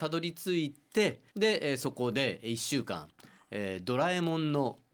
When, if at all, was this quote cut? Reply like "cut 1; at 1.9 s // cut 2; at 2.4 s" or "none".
cut 1; at 1.3 s